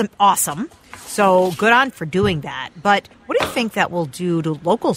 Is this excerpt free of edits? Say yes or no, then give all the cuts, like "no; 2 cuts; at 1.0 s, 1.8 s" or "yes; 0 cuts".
no; 2 cuts; at 1.9 s, 3.1 s